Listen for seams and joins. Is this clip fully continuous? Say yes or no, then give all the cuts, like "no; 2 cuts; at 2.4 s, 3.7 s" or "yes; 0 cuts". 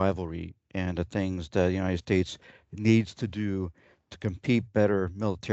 yes; 0 cuts